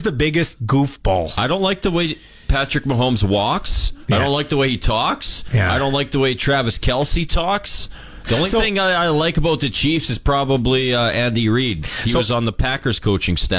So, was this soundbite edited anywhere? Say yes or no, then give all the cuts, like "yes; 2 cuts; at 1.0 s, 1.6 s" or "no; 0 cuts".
no; 0 cuts